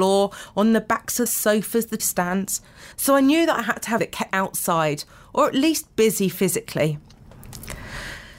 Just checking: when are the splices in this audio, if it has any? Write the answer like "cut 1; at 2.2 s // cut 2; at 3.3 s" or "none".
cut 1; at 1.3 s // cut 2; at 2.0 s // cut 3; at 2.9 s // cut 4; at 4.0 s // cut 5; at 4.3 s